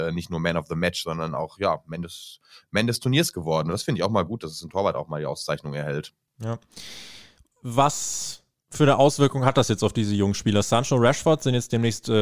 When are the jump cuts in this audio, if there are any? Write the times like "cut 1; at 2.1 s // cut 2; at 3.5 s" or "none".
none

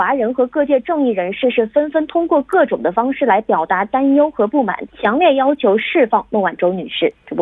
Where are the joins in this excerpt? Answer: cut 1; at 4.9 s

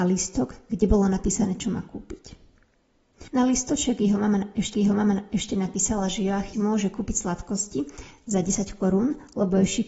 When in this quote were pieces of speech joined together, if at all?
cut 1; at 3.3 s // cut 2; at 4.7 s // cut 3; at 6.5 s

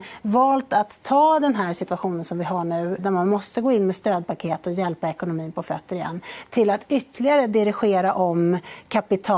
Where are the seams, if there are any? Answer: cut 1; at 3.0 s

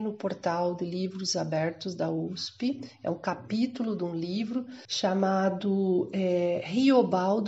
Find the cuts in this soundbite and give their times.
cut 1; at 4.8 s

